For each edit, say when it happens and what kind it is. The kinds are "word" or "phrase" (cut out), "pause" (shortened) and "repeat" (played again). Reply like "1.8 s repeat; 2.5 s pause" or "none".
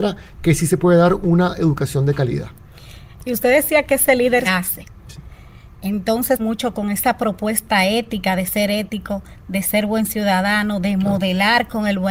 4.4 s word; 6.4 s phrase